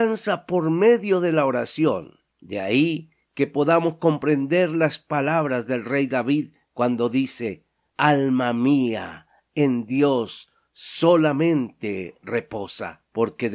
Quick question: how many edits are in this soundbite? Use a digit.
0